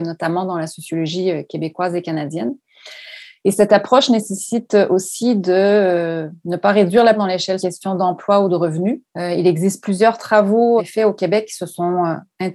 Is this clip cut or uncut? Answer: cut